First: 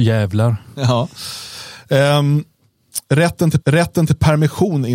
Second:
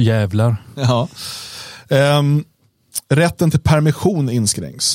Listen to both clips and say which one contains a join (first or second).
first